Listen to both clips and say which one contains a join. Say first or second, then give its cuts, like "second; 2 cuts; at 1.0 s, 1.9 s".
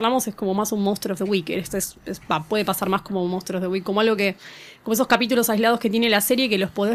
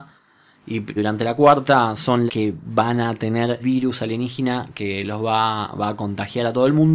second; 3 cuts; at 1.0 s, 2.3 s, 3.6 s